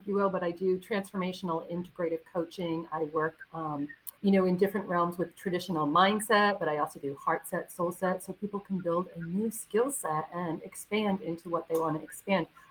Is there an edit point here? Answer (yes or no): yes